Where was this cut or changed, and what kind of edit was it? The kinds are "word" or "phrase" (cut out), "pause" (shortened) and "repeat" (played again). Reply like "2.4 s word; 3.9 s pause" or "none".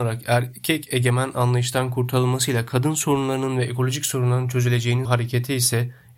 5.0 s word